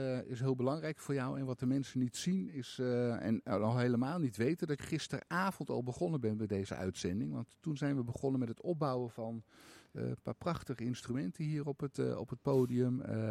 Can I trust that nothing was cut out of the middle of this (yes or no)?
no